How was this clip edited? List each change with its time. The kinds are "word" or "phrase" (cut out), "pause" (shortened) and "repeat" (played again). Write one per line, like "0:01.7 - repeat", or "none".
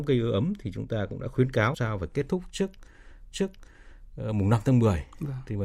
0:01.7 - word
0:03.3 - repeat